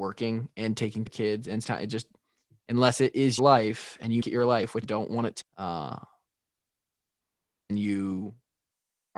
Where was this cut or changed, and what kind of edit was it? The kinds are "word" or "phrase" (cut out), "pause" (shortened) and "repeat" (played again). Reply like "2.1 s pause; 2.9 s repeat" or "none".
1.1 s word; 1.6 s word; 3.4 s word; 4.2 s word; 4.8 s word; 5.4 s word; 7.7 s word